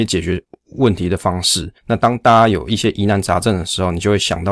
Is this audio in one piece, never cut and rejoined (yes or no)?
no